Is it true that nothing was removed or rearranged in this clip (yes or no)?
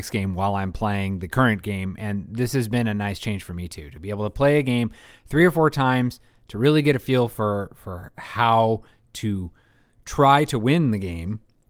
yes